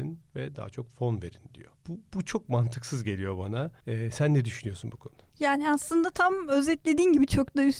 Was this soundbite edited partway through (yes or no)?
yes